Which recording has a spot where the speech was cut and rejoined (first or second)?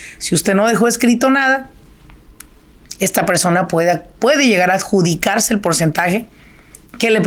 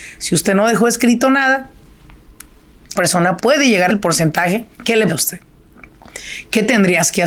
second